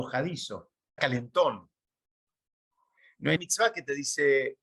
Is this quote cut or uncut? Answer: cut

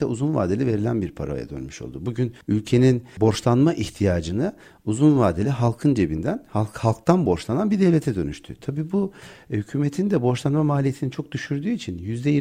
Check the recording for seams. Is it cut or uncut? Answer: uncut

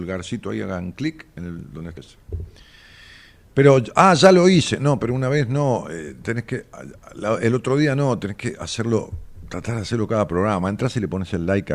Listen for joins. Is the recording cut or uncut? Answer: cut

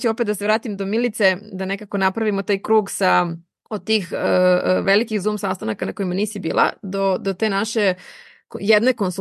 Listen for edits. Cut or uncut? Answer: uncut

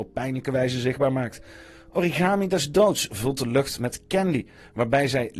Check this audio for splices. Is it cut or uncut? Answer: uncut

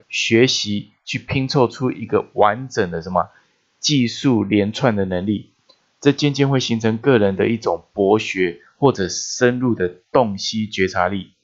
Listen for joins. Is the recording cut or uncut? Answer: uncut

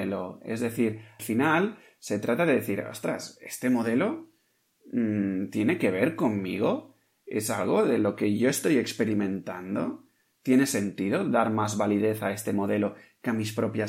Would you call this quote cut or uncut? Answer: cut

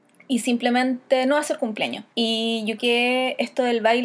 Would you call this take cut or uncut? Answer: cut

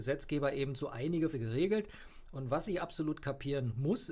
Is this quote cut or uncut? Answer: cut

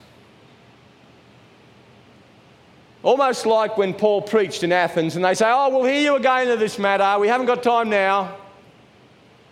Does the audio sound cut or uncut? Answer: uncut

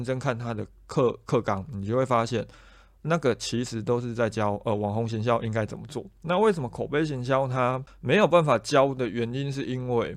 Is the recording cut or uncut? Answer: uncut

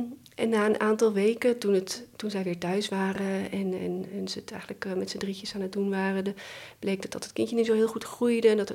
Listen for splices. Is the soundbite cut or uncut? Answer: uncut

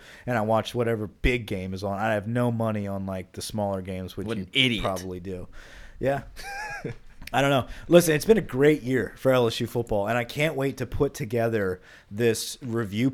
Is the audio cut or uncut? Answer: uncut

